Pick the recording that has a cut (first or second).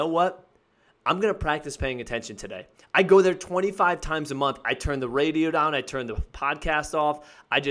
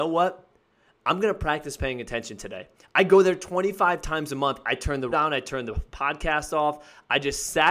second